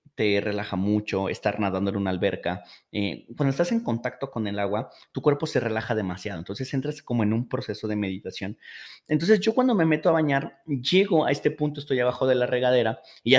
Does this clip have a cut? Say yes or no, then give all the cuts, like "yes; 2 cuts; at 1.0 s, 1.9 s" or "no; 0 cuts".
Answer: no; 0 cuts